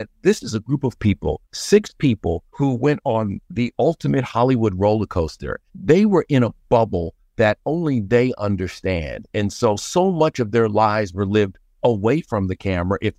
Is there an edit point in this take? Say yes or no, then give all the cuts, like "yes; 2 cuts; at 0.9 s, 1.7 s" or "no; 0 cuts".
yes; 3 cuts; at 1.4 s, 2.5 s, 5.7 s